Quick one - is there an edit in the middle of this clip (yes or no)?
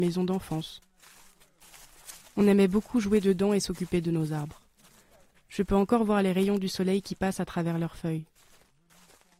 no